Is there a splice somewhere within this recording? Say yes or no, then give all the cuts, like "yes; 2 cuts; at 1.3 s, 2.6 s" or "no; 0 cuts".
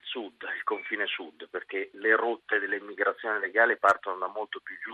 no; 0 cuts